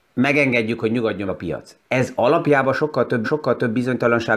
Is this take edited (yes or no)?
yes